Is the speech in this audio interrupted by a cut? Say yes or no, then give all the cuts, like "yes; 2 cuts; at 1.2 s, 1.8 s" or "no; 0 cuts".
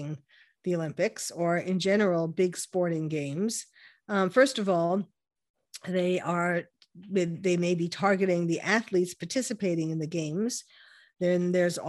no; 0 cuts